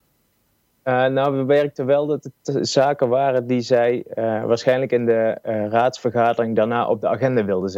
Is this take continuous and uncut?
yes; 0 cuts

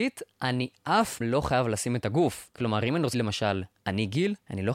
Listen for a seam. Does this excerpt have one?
yes; 2 cuts; at 1.2 s, 3.1 s

